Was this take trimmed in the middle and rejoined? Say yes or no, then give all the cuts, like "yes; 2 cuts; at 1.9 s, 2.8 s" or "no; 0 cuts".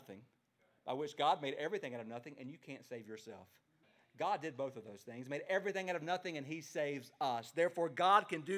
yes; 1 cut; at 3.8 s